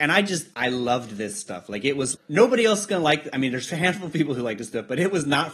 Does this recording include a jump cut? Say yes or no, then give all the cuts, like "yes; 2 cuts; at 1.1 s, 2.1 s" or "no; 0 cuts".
yes; 1 cut; at 2.1 s